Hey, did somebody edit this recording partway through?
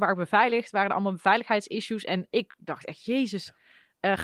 no; 0 cuts

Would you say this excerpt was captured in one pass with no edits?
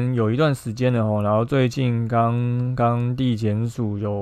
yes; 0 cuts

